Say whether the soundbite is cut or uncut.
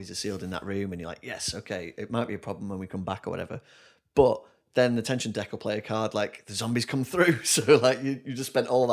uncut